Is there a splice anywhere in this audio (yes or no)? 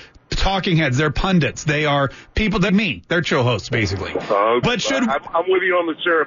yes